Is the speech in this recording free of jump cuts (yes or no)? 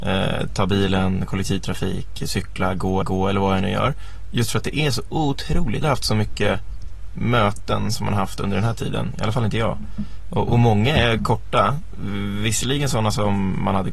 no